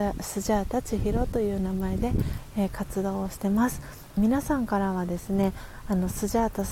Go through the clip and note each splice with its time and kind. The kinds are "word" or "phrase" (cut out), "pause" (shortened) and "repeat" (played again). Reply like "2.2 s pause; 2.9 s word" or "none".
4.2 s phrase